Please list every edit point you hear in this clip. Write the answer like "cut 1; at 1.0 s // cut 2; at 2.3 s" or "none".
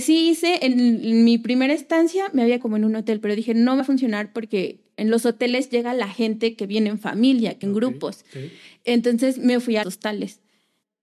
cut 1; at 2.6 s // cut 2; at 3.8 s // cut 3; at 7.6 s // cut 4; at 9.8 s